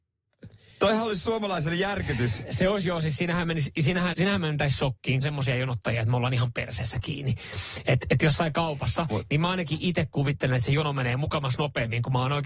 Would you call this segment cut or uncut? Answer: cut